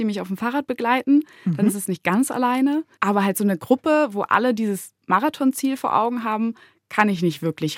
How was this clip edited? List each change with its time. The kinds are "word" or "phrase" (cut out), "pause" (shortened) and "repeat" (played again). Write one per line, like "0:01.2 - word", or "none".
0:02.9 - pause